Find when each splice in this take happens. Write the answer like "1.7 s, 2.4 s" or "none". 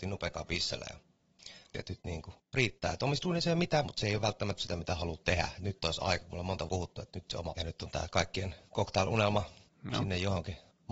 1.7 s, 3.8 s, 4.6 s, 6.7 s, 7.6 s